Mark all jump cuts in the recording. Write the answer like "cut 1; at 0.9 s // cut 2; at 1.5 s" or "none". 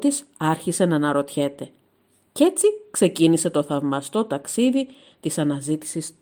none